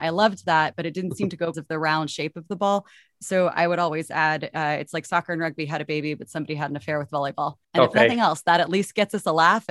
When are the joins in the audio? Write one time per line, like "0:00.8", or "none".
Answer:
0:01.5
0:07.6